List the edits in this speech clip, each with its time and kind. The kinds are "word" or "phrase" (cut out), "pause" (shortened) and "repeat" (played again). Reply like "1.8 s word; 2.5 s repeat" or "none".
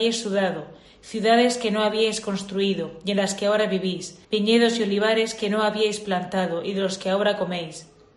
4.2 s pause